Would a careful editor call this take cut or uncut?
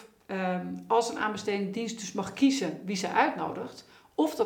uncut